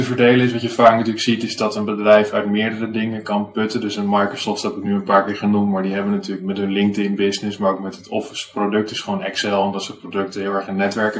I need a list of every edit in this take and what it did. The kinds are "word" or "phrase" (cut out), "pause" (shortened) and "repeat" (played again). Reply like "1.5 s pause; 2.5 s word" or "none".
none